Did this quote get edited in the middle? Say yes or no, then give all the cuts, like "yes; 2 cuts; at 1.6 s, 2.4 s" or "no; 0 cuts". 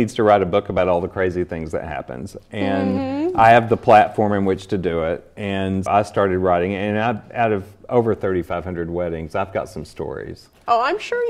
yes; 1 cut; at 5.9 s